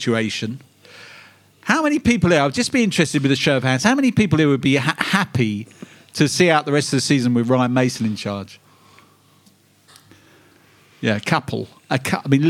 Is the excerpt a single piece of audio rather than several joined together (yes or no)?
yes